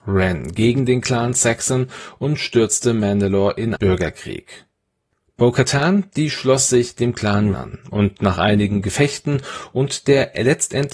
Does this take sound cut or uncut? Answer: cut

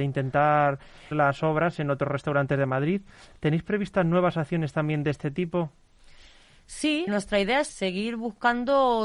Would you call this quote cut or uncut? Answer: cut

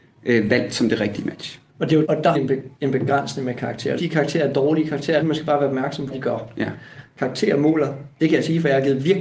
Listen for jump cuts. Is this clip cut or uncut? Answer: cut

